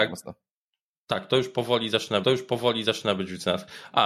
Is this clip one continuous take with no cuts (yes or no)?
no